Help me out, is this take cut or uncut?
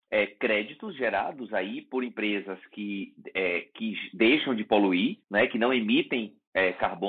cut